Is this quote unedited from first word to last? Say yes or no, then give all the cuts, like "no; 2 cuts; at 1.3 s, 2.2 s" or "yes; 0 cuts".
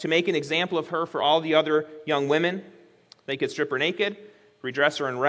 yes; 0 cuts